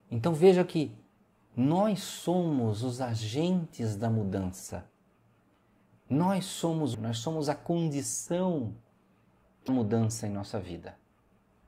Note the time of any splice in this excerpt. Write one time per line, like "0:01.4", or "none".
0:06.9
0:09.7